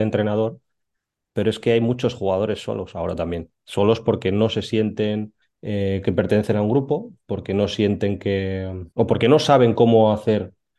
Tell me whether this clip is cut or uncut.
cut